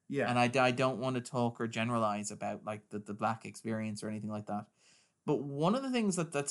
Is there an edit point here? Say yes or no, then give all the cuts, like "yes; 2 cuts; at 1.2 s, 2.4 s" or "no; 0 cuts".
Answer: no; 0 cuts